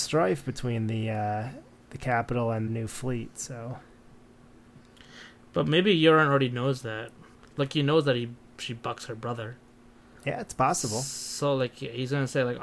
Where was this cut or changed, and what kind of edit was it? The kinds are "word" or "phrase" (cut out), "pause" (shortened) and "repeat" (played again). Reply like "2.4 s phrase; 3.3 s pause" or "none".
2.7 s phrase; 7.3 s pause